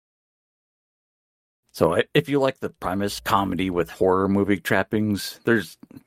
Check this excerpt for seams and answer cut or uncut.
cut